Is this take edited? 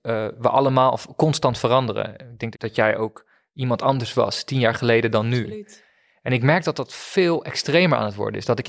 yes; 1 cut; at 2.5 s

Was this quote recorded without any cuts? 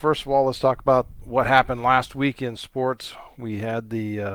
yes; 0 cuts

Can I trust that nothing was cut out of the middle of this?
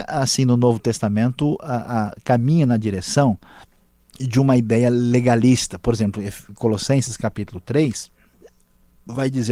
yes; 0 cuts

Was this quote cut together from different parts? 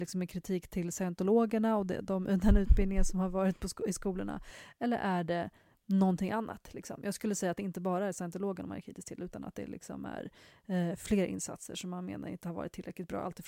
no; 0 cuts

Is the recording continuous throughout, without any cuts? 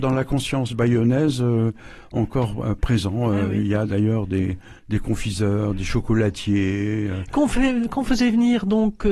no; 1 cut; at 4.8 s

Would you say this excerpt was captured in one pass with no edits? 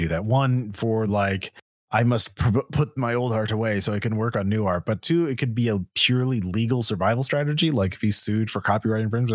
yes; 0 cuts

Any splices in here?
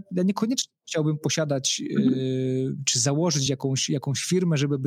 no; 0 cuts

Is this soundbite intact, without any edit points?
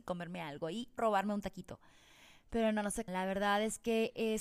no; 2 cuts; at 1.0 s, 3.1 s

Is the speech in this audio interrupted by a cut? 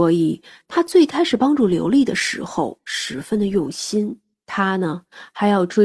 yes; 1 cut; at 4.3 s

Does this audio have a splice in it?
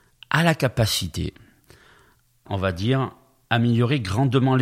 yes; 1 cut; at 2.5 s

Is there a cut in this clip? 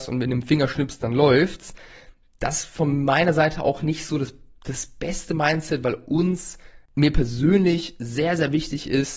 no; 0 cuts

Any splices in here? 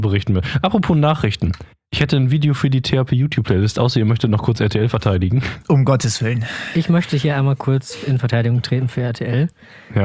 no; 0 cuts

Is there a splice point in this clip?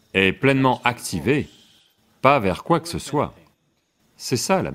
no; 0 cuts

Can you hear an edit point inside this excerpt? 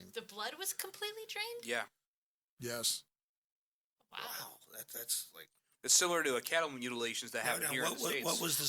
no; 0 cuts

